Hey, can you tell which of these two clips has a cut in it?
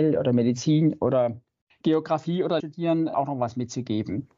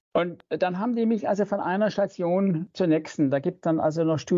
first; 3 cuts; at 1.7 s, 2.6 s, 3.1 s

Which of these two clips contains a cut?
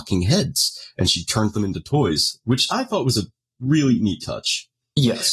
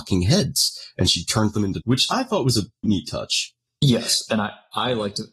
second; 2 cuts; at 1.8 s, 2.8 s

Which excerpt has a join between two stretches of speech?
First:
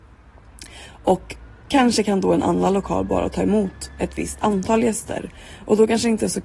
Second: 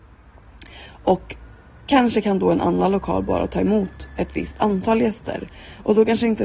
first; 1 cut; at 1.6 s

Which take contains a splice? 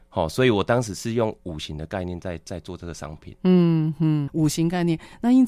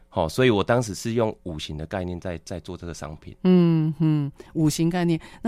first; 1 cut; at 4.3 s

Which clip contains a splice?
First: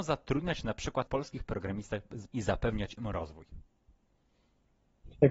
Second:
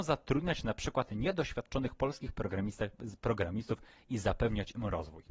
first; 2 cuts; at 1.1 s, 2.3 s

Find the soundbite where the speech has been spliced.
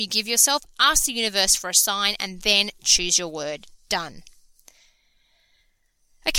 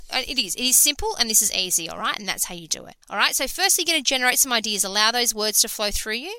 second; 1 cut; at 3.0 s

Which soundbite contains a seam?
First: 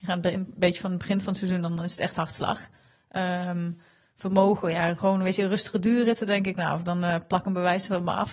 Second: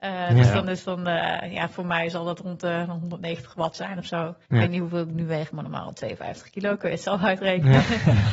second; 1 cut; at 4.4 s

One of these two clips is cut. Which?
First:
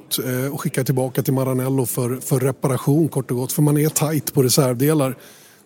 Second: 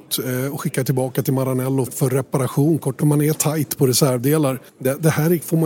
second; 3 cuts; at 1.9 s, 3.0 s, 4.7 s

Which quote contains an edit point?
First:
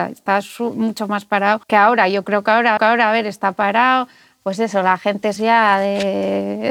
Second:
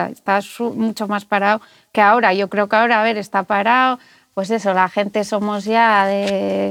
first; 3 cuts; at 1.6 s, 2.8 s, 5.4 s

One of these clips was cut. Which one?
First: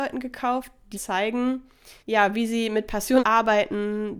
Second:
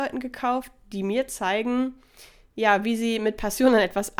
first; 3 cuts; at 0.9 s, 2.0 s, 3.2 s

